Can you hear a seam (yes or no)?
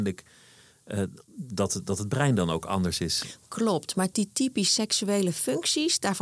yes